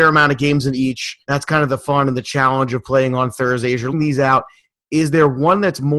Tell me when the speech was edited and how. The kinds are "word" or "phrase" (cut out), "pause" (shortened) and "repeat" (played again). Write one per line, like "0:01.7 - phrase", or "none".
0:01.2 - pause
0:03.9 - word